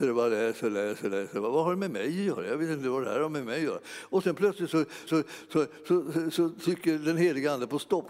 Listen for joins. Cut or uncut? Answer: cut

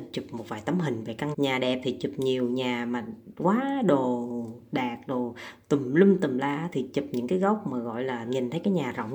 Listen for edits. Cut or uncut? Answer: cut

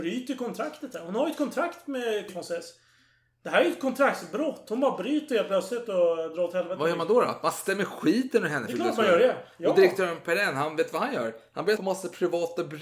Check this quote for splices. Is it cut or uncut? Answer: cut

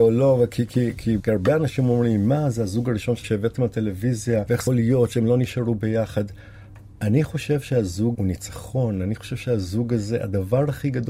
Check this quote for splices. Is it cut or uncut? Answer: cut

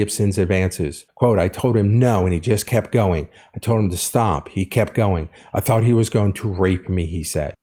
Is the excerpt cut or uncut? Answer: uncut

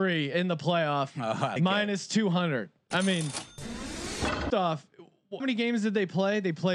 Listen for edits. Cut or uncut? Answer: cut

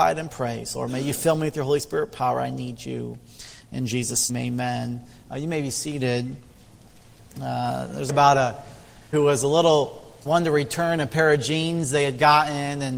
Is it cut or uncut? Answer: cut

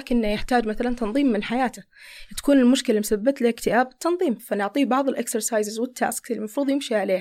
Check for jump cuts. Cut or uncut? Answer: uncut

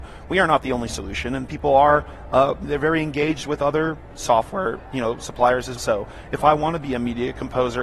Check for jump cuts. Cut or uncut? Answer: cut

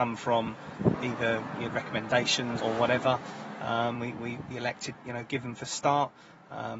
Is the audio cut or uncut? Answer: cut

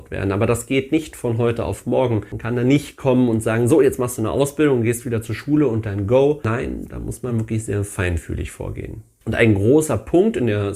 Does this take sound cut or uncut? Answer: uncut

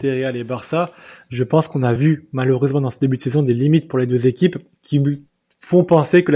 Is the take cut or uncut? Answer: uncut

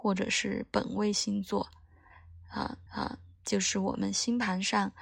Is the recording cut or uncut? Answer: cut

